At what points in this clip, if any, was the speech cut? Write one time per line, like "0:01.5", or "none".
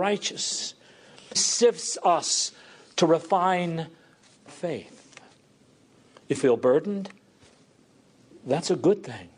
0:01.3
0:04.5
0:06.4